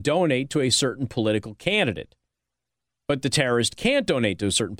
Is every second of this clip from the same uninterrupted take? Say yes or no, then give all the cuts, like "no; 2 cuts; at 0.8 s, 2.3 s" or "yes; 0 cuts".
yes; 0 cuts